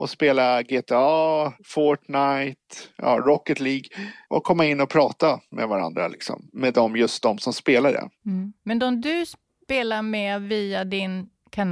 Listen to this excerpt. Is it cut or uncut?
cut